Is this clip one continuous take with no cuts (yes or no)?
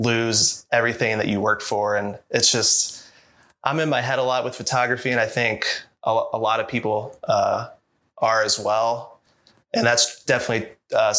yes